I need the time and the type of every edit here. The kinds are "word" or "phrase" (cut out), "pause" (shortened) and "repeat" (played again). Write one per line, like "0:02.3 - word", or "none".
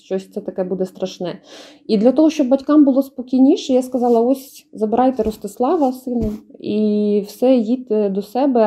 none